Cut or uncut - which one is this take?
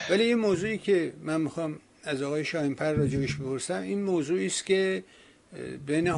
uncut